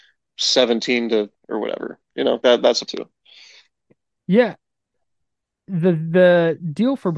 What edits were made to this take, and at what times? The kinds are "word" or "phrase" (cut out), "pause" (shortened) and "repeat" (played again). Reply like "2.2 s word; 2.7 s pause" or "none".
1.4 s word; 2.4 s word; 2.9 s word